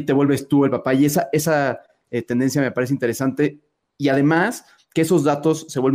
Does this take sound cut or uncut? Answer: uncut